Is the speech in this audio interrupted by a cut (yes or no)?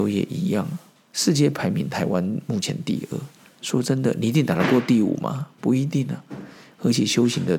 no